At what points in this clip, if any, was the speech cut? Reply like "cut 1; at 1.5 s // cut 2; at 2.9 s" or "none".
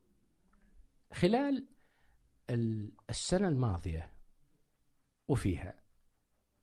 none